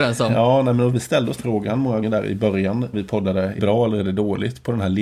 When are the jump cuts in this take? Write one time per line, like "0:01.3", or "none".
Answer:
0:01.4
0:02.0
0:02.9
0:03.6